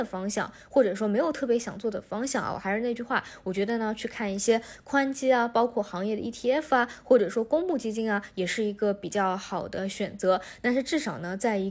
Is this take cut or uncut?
uncut